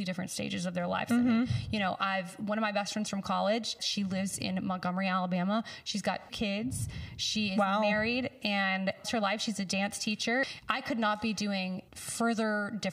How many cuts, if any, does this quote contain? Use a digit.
4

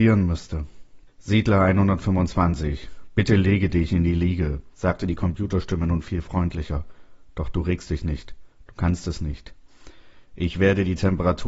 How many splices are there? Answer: 2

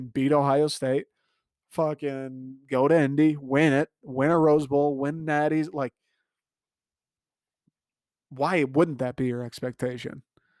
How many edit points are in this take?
0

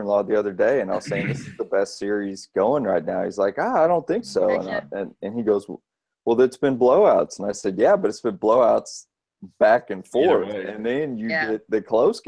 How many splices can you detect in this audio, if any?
0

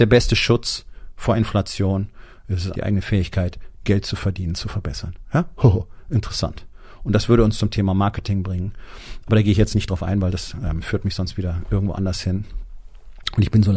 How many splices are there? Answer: 1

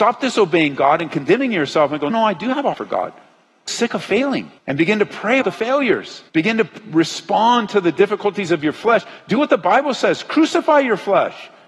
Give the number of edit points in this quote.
6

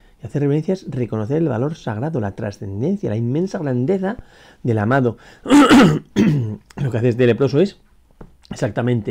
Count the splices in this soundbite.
0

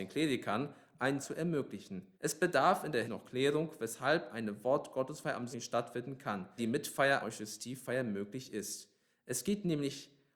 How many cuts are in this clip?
6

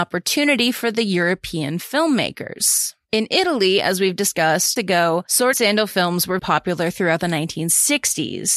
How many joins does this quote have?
3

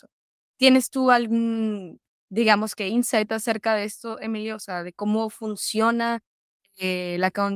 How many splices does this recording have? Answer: 0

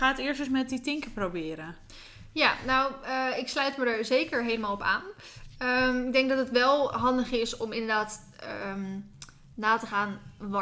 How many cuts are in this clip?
0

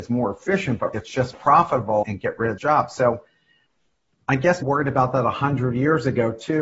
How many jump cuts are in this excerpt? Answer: 5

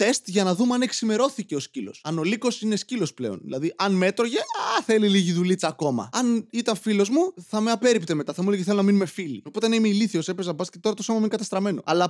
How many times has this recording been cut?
0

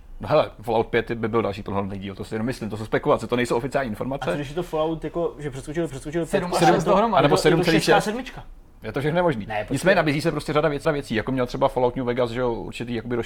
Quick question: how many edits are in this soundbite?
2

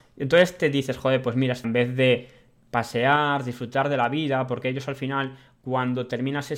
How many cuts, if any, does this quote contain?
1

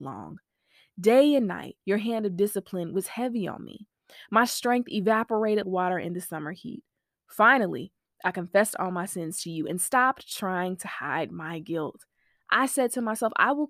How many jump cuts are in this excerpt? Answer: 2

